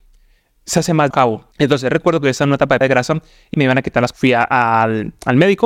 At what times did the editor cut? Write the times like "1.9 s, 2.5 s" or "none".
1.1 s, 1.5 s, 2.8 s, 3.5 s, 4.1 s